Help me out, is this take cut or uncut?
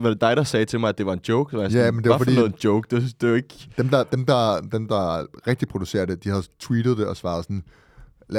uncut